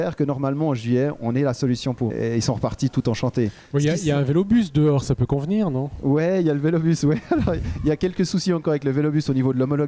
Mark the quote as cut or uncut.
cut